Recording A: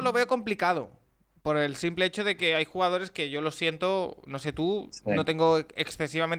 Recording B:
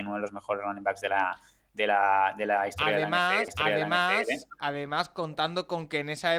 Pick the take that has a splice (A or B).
B